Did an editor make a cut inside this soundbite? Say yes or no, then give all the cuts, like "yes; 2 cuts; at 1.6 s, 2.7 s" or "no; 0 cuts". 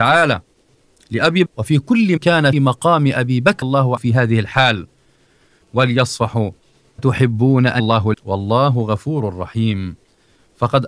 yes; 9 cuts; at 1.5 s, 2.2 s, 2.5 s, 3.6 s, 4.0 s, 5.6 s, 7.0 s, 7.8 s, 8.1 s